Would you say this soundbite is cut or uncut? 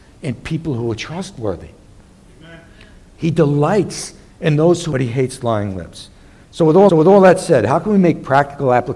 cut